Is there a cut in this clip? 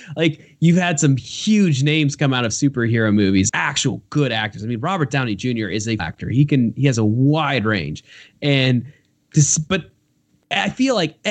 yes; 2 cuts; at 3.5 s, 6.0 s

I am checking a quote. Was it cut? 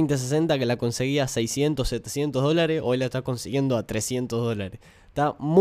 no; 0 cuts

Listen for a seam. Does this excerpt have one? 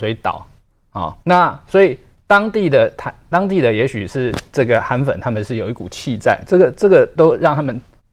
yes; 1 cut; at 1.2 s

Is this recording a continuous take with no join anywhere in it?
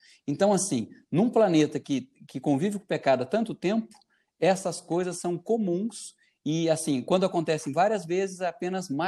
yes; 0 cuts

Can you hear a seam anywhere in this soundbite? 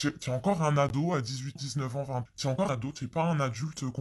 yes; 3 cuts; at 1.6 s, 2.3 s, 2.7 s

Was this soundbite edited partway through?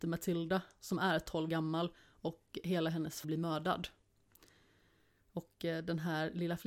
yes; 2 cuts; at 1.5 s, 3.2 s

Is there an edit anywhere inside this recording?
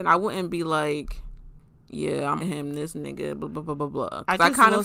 yes; 2 cuts; at 1.6 s, 2.4 s

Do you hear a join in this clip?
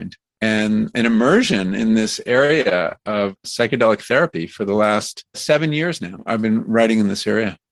no; 0 cuts

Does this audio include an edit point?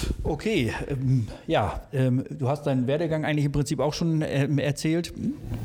no; 0 cuts

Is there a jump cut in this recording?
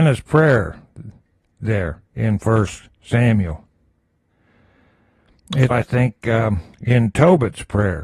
yes; 3 cuts; at 2.1 s, 5.7 s, 6.7 s

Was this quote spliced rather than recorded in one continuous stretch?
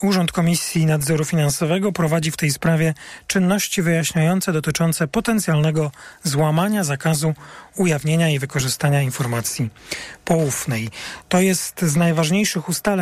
no; 0 cuts

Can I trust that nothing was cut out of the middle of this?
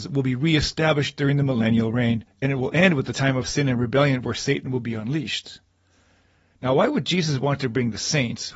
yes; 0 cuts

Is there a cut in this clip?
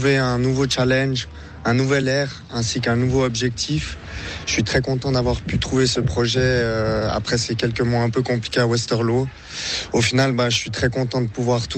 no; 0 cuts

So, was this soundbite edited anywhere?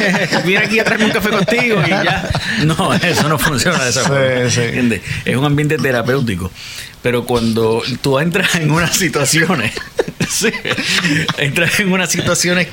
no; 0 cuts

